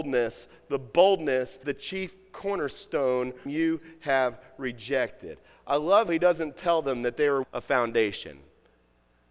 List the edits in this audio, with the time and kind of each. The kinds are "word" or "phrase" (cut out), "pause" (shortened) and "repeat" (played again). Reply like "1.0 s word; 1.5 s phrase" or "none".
1.6 s word; 3.5 s word; 6.1 s word; 7.4 s word